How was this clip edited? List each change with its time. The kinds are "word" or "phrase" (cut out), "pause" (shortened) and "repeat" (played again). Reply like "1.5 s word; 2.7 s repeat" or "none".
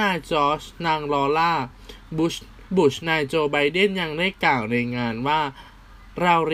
2.7 s pause